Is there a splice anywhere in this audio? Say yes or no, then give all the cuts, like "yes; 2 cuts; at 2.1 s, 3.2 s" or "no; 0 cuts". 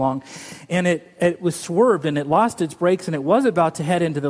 no; 0 cuts